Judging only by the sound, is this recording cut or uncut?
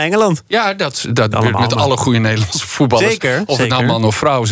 cut